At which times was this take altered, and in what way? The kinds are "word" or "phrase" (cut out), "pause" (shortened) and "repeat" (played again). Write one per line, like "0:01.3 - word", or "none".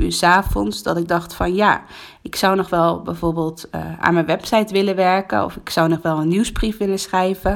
none